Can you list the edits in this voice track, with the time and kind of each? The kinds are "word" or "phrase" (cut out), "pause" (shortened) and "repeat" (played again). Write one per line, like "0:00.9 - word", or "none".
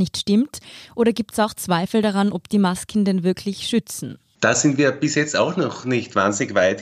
none